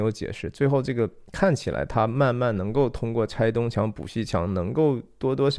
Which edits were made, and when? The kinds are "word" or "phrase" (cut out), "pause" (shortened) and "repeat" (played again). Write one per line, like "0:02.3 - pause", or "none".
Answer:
0:01.3 - pause